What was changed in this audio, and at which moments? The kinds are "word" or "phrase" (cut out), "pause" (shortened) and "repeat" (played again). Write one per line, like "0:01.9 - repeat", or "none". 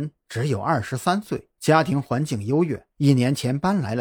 0:01.6 - pause
0:02.9 - pause